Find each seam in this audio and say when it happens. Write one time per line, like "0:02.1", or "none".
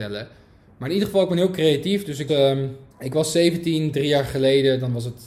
0:02.3
0:02.9